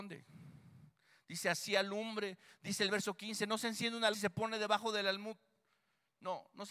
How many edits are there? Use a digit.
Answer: 1